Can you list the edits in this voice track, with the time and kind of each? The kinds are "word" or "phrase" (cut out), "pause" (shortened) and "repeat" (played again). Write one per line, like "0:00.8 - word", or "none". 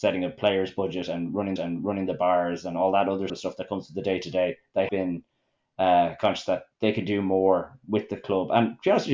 0:01.6 - repeat
0:03.3 - word
0:04.9 - word
0:06.7 - pause